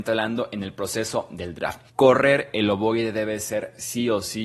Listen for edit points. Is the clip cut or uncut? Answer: cut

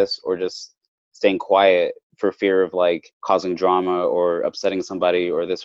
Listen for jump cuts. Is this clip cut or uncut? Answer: cut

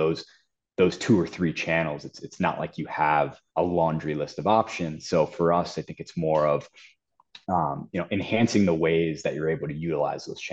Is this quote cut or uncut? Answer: cut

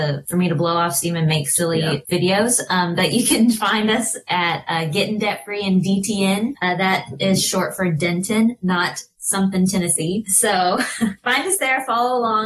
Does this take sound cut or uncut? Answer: uncut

